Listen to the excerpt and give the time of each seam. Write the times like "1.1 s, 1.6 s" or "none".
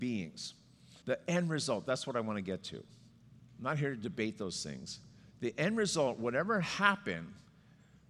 1.0 s